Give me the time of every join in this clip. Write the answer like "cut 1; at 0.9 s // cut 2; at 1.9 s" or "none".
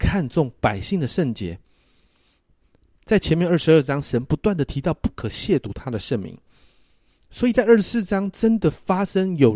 none

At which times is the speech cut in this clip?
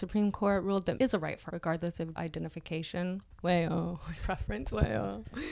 cut 1; at 0.9 s // cut 2; at 1.5 s // cut 3; at 2.2 s // cut 4; at 3.3 s // cut 5; at 4.2 s

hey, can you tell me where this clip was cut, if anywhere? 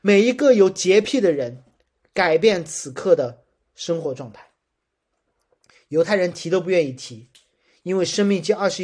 none

